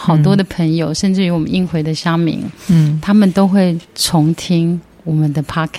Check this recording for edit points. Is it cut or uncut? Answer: cut